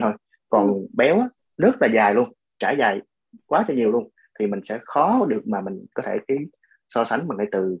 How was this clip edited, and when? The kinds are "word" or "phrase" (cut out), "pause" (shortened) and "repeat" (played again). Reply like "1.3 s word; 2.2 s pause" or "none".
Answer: none